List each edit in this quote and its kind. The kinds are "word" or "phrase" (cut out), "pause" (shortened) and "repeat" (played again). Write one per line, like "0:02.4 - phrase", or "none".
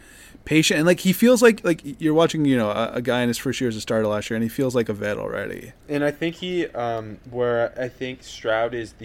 0:05.8 - pause

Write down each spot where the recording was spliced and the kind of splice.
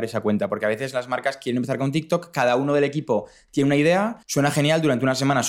0:04.2 - pause

